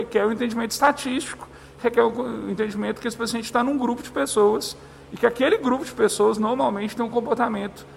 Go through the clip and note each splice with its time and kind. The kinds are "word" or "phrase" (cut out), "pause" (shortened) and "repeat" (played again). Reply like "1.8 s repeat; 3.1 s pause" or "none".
none